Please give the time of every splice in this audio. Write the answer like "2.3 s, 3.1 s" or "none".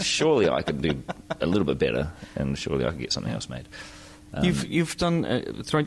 none